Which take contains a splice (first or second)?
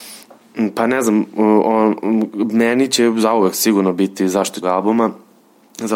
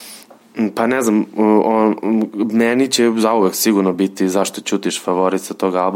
first